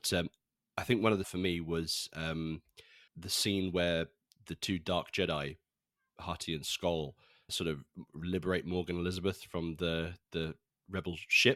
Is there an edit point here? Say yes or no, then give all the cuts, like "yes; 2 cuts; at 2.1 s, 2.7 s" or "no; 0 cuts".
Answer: yes; 3 cuts; at 1.2 s, 3.1 s, 7.5 s